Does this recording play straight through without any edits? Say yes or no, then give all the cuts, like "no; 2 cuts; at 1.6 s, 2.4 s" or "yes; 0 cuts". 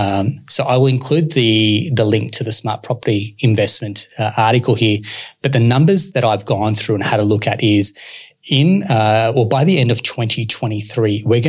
yes; 0 cuts